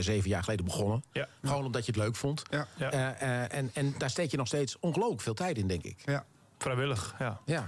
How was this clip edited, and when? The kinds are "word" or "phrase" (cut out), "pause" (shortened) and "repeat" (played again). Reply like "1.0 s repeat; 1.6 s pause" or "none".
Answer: none